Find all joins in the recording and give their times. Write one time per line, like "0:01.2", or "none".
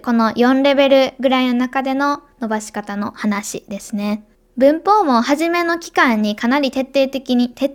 0:04.3

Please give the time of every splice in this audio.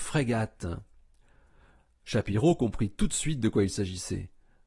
none

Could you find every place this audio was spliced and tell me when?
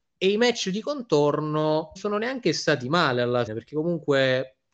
0:02.0
0:03.5

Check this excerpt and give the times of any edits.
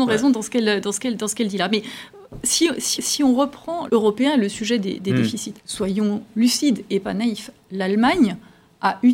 0:03.0
0:03.9
0:05.6

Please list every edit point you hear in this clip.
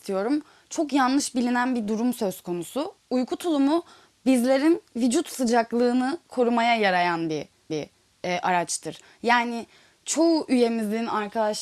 0:07.7

